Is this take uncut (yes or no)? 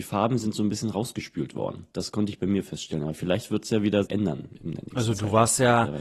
no